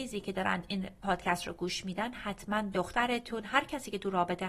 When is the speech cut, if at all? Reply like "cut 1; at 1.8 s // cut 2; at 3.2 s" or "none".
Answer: cut 1; at 2.1 s // cut 2; at 2.7 s